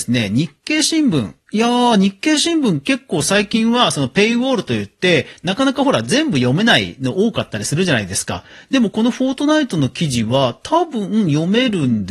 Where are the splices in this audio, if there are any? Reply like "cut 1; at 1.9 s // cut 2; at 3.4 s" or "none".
none